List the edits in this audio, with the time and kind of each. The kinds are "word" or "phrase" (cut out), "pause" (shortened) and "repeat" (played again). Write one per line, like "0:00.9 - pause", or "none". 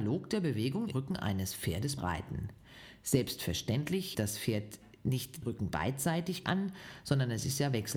0:00.9 - word
0:02.0 - word
0:04.1 - word
0:05.4 - word
0:06.4 - word